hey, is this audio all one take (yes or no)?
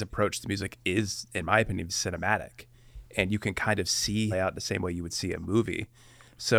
no